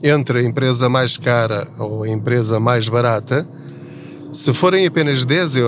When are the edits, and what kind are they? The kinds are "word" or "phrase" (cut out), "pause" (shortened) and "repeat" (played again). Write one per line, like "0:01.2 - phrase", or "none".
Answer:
none